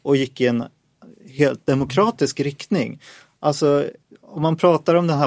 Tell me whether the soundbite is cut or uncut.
uncut